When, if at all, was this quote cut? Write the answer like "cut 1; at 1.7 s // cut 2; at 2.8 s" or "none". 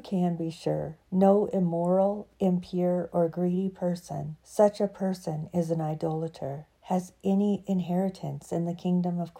cut 1; at 1.0 s // cut 2; at 4.4 s // cut 3; at 6.7 s